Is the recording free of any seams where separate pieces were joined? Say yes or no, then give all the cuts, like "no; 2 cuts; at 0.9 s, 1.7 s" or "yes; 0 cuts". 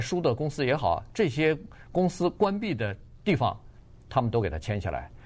no; 1 cut; at 3.2 s